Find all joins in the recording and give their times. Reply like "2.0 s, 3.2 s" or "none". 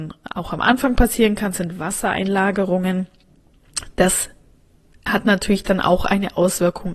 none